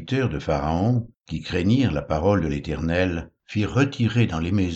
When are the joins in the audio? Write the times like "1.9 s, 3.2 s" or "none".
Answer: 1.2 s, 3.4 s